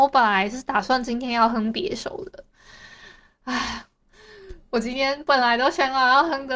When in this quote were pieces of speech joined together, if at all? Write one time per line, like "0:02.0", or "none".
none